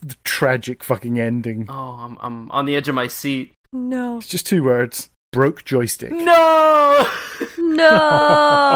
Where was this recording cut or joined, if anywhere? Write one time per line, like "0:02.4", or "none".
0:03.6
0:05.2